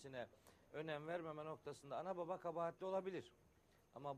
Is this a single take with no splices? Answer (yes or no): yes